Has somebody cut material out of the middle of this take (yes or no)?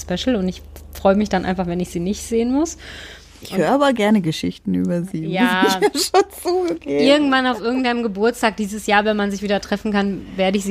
no